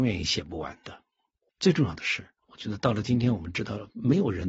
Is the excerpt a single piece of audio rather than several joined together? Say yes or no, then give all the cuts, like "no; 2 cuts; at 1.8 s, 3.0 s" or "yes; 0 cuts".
yes; 0 cuts